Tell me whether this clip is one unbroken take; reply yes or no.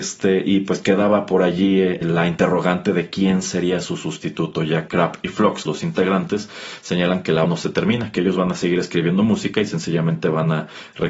no